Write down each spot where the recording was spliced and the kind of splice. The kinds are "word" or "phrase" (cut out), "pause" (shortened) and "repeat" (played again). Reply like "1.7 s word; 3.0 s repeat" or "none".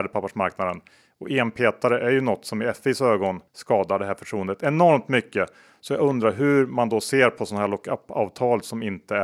3.5 s pause